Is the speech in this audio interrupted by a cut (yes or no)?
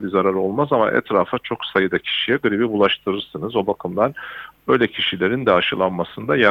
no